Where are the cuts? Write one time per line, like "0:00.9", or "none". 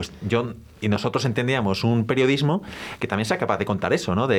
none